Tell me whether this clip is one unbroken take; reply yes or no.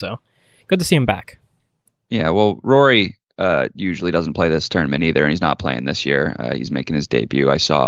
yes